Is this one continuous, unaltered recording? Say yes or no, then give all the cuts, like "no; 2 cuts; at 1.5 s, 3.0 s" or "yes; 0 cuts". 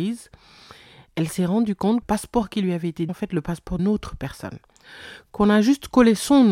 no; 3 cuts; at 2.0 s, 3.1 s, 3.8 s